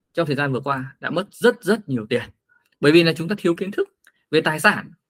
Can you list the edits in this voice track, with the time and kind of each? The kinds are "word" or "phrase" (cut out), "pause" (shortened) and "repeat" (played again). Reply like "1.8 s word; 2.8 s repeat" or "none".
none